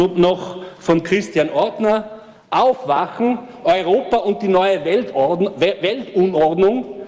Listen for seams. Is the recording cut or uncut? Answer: uncut